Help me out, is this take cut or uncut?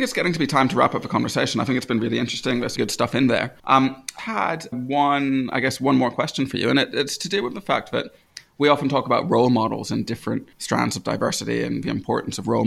cut